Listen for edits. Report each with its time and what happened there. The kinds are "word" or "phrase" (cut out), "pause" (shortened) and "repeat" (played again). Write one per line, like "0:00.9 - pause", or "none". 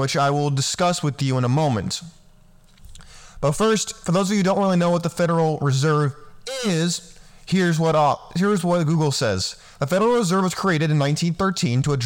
none